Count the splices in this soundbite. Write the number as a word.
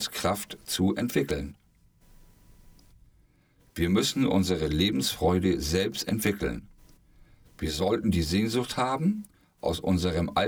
zero